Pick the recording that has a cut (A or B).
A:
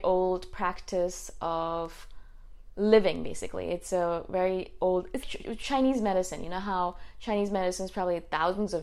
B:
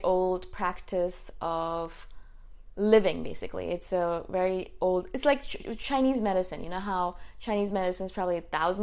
A